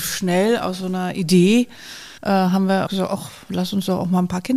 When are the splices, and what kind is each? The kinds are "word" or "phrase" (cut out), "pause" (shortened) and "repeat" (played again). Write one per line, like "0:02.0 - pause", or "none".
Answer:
0:02.2 - pause
0:02.9 - word